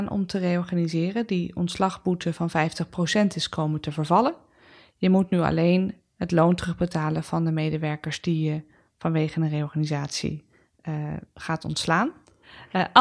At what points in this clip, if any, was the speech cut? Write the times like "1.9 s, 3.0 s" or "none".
none